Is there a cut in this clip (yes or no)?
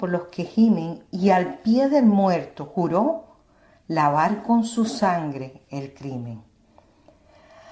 no